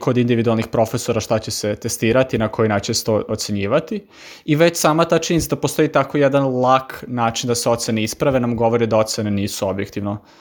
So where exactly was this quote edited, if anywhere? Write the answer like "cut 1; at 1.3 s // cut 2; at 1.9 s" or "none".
none